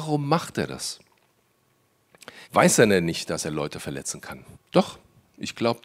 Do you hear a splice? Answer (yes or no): yes